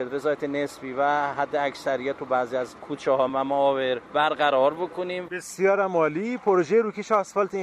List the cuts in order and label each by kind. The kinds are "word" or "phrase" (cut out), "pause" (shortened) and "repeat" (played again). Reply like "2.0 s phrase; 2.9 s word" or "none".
none